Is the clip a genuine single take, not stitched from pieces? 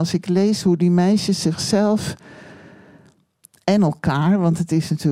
yes; 0 cuts

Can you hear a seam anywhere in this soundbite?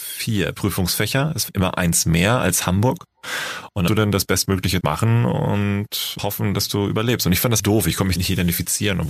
yes; 6 cuts; at 1.5 s, 3.9 s, 4.8 s, 6.2 s, 7.6 s, 8.2 s

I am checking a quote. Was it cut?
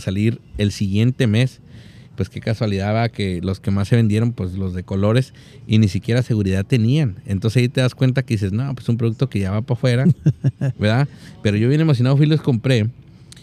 no; 0 cuts

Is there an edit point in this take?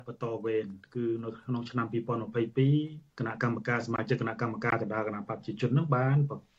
yes; 1 cut; at 3.1 s

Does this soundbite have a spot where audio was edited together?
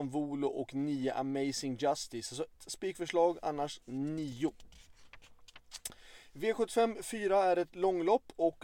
yes; 2 cuts; at 2.6 s, 3.8 s

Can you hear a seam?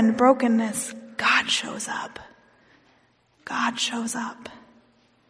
no; 0 cuts

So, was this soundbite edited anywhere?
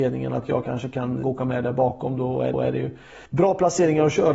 yes; 3 cuts; at 1.2 s, 2.5 s, 3.3 s

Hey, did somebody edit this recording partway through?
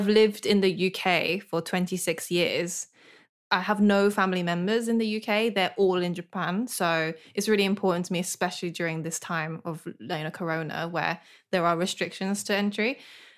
no; 0 cuts

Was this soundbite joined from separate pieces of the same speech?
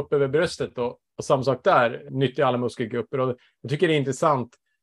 yes; 1 cut; at 2.1 s

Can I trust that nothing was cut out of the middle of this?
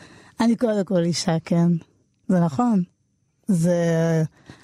yes; 0 cuts

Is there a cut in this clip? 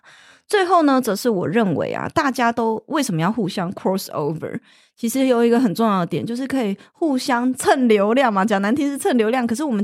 no; 0 cuts

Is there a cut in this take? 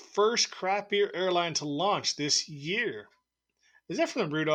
no; 0 cuts

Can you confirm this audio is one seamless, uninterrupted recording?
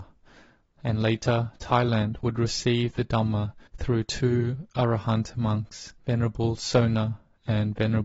no; 2 cuts; at 3.7 s, 6.0 s

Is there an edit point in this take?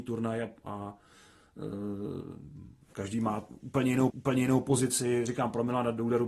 yes; 2 cuts; at 2.8 s, 4.1 s

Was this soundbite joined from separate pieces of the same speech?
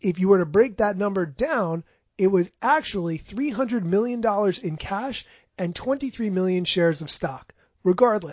no; 0 cuts

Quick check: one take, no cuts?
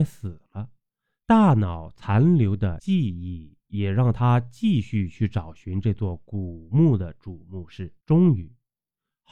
no; 1 cut; at 8.0 s

